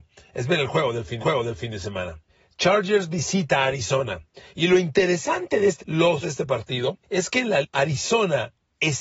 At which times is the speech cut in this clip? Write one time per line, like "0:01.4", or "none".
0:01.2
0:02.3
0:05.8
0:06.2
0:07.0
0:07.6